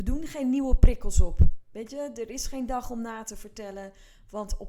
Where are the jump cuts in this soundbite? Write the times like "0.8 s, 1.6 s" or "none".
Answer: none